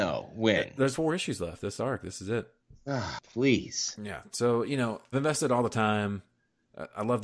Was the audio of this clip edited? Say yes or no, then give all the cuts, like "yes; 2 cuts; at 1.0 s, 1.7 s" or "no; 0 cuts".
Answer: yes; 4 cuts; at 0.9 s, 1.8 s, 2.6 s, 5.1 s